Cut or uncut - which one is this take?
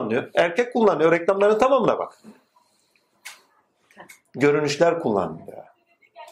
uncut